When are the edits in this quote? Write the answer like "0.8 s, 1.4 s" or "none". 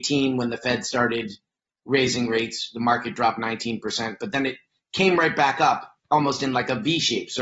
none